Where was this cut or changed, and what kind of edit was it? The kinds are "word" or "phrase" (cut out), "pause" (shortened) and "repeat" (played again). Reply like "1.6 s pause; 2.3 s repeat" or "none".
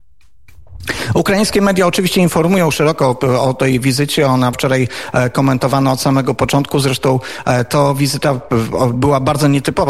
4.5 s word